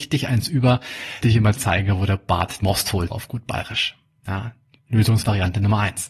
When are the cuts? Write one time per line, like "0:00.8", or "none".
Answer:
0:01.2
0:02.6
0:03.1